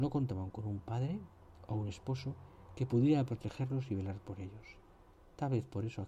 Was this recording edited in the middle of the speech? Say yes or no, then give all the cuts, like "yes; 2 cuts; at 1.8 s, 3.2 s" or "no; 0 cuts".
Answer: no; 0 cuts